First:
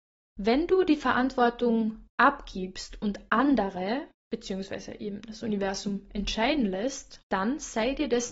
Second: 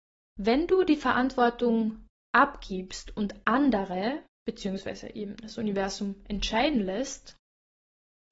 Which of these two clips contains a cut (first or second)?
first